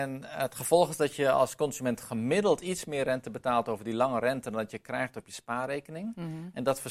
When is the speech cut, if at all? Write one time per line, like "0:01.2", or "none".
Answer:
none